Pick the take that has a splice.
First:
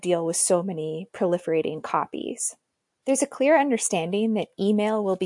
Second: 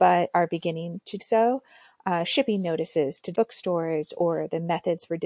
second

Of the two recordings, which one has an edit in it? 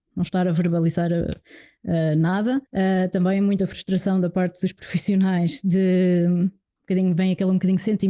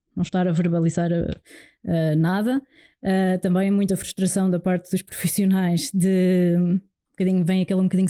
first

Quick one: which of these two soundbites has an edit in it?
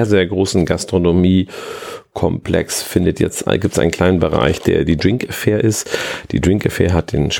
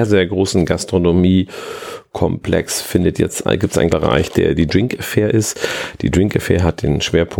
second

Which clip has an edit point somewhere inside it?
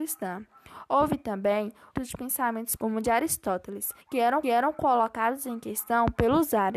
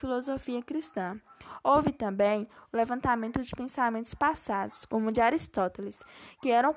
first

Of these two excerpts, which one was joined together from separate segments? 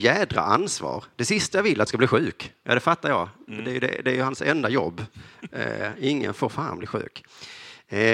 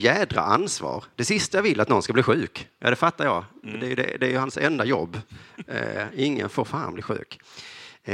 first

